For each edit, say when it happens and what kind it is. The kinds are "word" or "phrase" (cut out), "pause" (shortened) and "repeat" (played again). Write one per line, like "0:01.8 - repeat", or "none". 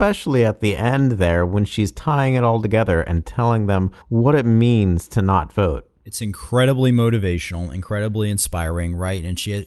0:04.0 - pause